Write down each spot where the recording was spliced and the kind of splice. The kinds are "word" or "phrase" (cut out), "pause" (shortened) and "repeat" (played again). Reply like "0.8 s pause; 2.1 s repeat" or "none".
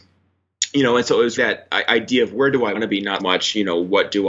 1.4 s word; 2.7 s word; 3.2 s word

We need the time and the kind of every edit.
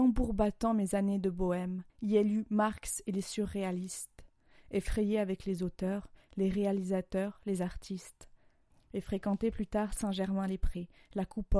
1.9 s pause

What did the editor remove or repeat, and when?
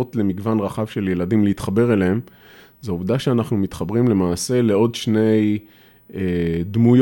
none

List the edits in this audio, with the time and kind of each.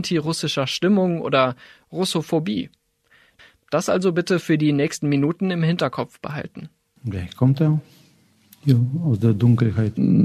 none

